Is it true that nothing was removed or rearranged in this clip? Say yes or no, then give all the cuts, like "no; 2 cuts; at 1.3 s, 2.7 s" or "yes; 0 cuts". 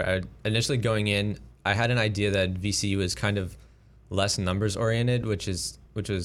yes; 0 cuts